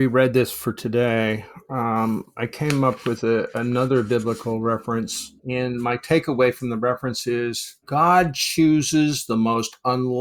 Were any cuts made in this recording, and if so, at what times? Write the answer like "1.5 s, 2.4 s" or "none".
5.4 s, 7.8 s

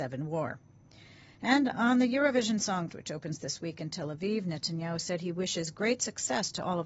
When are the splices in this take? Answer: 2.9 s

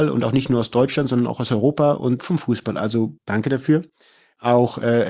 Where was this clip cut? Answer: 2.2 s, 3.2 s

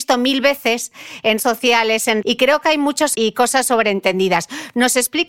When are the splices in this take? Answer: 1.4 s, 2.2 s, 3.1 s

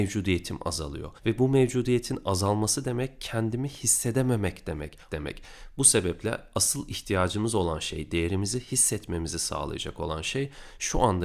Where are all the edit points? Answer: 1.2 s, 5.1 s

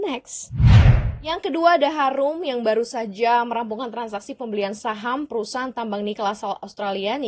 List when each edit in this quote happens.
none

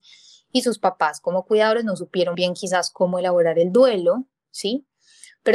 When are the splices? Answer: 2.3 s

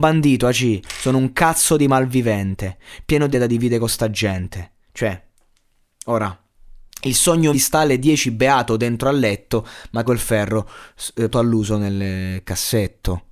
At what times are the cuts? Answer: 3.3 s, 4.8 s, 7.5 s, 10.1 s, 11.3 s

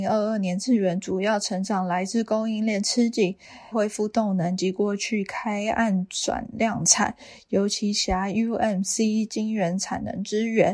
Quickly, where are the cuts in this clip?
3.7 s

